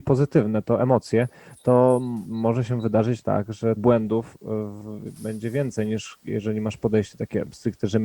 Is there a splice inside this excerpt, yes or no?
yes